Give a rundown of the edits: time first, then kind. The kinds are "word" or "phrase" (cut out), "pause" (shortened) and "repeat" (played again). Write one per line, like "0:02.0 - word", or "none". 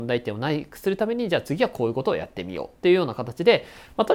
0:02.8 - pause